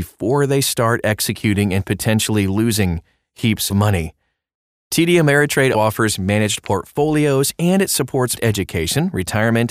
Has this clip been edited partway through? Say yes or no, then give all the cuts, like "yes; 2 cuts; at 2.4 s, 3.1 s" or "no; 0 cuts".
yes; 3 cuts; at 3.7 s, 5.7 s, 8.4 s